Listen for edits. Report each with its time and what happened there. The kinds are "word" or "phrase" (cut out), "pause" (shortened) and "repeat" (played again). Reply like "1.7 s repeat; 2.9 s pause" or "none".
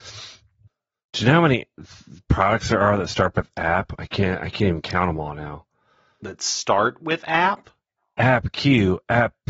none